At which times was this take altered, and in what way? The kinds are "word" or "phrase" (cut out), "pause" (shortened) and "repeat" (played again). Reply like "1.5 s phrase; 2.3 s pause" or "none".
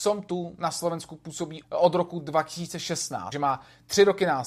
1.6 s word; 3.3 s word